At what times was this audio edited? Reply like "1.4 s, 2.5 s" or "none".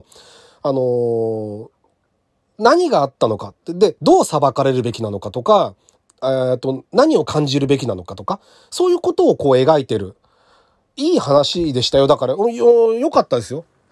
none